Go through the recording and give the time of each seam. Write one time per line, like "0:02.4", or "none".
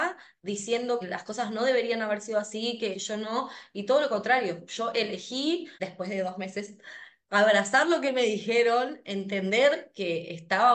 0:01.0
0:02.9
0:05.7